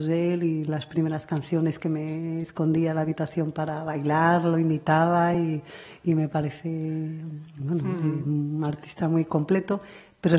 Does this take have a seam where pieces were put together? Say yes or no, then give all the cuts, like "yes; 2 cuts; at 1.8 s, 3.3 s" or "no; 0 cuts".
no; 0 cuts